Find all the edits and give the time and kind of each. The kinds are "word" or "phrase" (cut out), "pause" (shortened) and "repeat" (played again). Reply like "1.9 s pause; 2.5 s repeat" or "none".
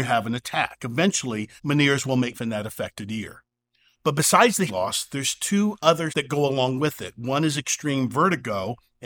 1.6 s pause; 2.3 s phrase; 4.7 s word; 6.1 s word